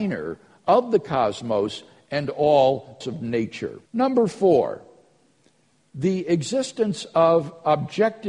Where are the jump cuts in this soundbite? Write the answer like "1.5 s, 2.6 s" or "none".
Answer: 3.0 s, 3.9 s